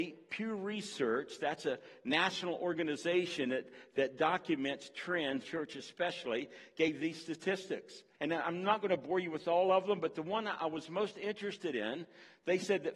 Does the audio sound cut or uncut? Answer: cut